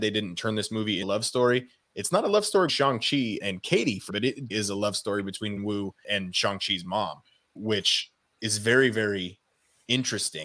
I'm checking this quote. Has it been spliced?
yes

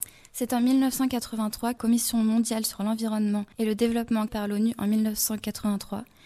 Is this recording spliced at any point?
yes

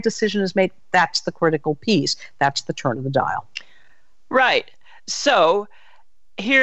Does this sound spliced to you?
no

